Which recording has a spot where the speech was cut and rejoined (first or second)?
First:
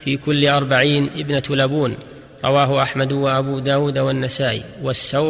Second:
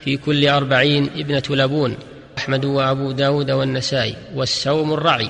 second